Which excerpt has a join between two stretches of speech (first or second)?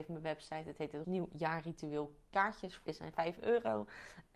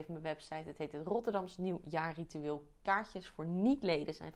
first